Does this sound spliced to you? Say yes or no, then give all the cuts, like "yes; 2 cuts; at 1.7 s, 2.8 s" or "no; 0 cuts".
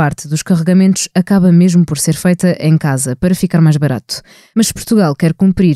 no; 0 cuts